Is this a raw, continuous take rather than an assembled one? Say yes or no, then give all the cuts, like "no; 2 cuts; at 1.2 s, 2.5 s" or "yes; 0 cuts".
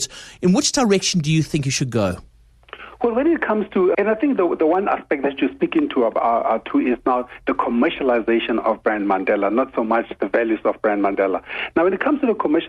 no; 1 cut; at 3.9 s